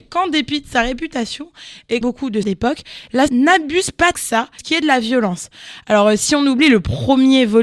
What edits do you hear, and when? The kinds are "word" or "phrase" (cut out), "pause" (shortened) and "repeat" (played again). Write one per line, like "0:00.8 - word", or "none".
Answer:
0:02.0 - word
0:02.4 - word
0:03.3 - word
0:04.1 - word
0:04.6 - word